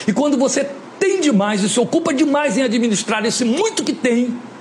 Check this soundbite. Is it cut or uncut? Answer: uncut